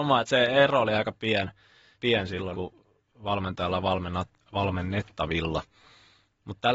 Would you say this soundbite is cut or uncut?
cut